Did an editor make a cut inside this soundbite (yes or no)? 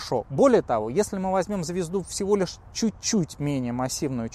no